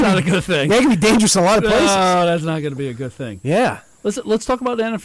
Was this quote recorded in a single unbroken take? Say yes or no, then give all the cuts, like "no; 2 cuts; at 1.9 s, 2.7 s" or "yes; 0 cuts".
yes; 0 cuts